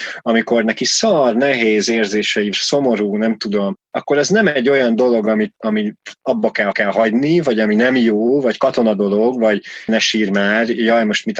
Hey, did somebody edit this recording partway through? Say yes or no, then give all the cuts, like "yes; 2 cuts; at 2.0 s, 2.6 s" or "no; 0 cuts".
yes; 4 cuts; at 2.5 s, 5.6 s, 6.7 s, 9.9 s